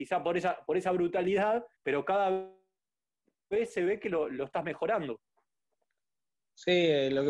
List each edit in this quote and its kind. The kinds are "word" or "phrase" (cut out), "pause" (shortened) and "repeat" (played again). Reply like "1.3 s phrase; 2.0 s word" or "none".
1.8 s word